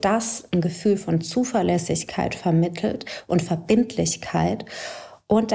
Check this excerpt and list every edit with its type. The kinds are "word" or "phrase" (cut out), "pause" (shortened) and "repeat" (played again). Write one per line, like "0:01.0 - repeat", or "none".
none